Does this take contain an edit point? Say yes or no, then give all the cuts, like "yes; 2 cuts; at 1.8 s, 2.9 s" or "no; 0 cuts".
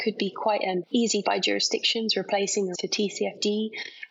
yes; 2 cuts; at 1.2 s, 2.7 s